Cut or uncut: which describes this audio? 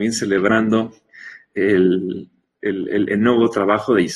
uncut